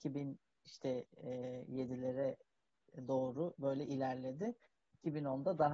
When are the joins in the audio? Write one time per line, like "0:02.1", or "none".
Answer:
none